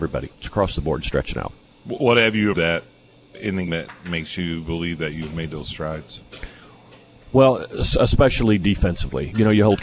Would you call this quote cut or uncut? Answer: cut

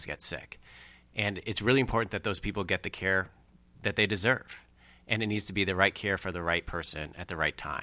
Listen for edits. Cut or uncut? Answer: uncut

